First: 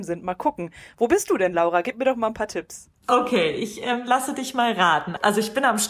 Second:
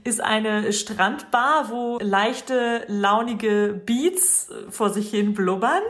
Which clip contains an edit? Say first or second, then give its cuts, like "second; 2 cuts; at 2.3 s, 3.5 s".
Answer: second; 1 cut; at 2.0 s